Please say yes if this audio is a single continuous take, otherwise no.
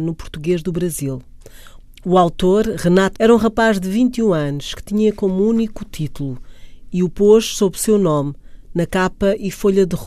no